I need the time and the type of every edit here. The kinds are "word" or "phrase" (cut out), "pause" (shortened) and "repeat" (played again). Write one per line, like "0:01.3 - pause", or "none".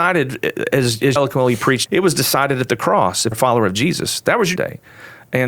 0:01.2 - word
0:01.9 - word
0:03.3 - word
0:04.6 - word